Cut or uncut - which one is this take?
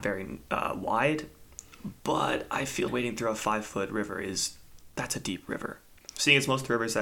cut